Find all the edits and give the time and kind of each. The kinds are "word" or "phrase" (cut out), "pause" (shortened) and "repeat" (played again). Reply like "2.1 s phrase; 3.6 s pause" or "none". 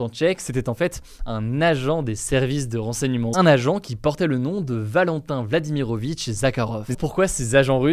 3.3 s word; 6.9 s word